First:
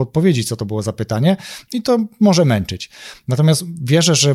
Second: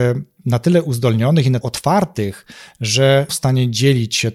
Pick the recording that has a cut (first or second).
second